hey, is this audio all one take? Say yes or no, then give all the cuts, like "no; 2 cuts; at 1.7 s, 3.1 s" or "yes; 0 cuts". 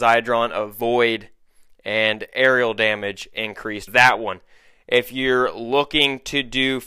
no; 1 cut; at 3.9 s